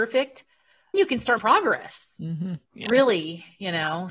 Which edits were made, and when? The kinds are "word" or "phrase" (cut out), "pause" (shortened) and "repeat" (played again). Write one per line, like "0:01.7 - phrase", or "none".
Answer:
0:00.9 - word
0:01.4 - word
0:02.7 - pause